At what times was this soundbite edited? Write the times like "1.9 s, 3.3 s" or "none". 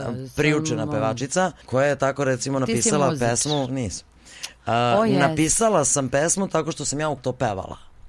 1.6 s, 7.2 s